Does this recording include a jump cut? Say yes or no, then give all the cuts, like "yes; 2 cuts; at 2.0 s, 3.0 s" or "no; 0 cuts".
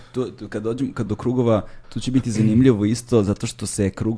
yes; 2 cuts; at 1.1 s, 1.8 s